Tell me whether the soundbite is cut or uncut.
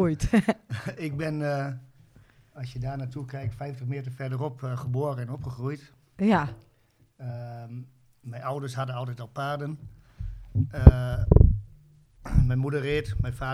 uncut